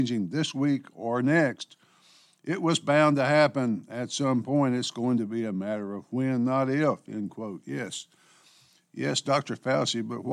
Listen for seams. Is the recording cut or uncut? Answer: uncut